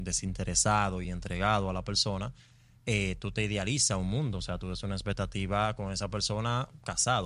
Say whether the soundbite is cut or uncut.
uncut